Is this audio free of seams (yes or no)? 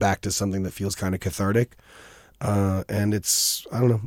yes